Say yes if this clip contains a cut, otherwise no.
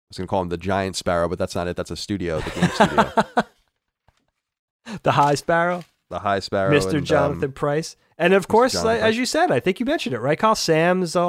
no